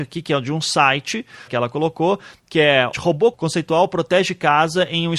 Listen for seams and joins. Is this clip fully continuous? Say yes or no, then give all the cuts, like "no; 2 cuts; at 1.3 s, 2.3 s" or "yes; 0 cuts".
no; 3 cuts; at 1.5 s, 2.9 s, 3.3 s